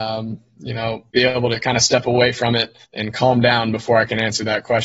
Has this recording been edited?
yes; 2 cuts; at 1.1 s, 2.8 s

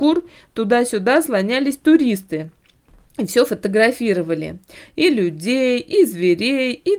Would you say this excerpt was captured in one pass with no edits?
yes; 0 cuts

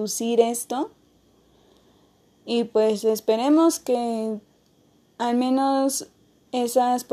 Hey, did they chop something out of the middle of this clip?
no; 0 cuts

